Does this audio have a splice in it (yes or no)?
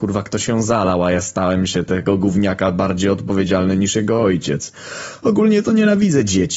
no